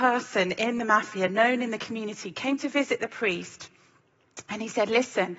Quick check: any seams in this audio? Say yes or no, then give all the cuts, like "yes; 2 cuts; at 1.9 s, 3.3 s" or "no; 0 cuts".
no; 0 cuts